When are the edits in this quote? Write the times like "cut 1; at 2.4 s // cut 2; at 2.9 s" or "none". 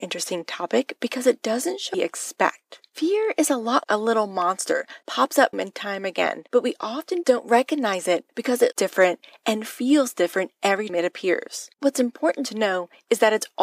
cut 1; at 1.9 s // cut 2; at 3.8 s // cut 3; at 5.0 s // cut 4; at 5.5 s // cut 5; at 6.5 s // cut 6; at 8.3 s // cut 7; at 8.7 s // cut 8; at 10.9 s // cut 9; at 11.7 s